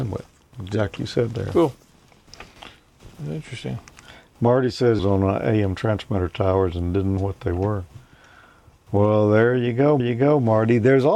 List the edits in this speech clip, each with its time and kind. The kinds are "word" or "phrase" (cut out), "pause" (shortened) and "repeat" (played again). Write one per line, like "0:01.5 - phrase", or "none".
0:01.0 - word
0:05.0 - phrase
0:07.2 - word
0:10.0 - repeat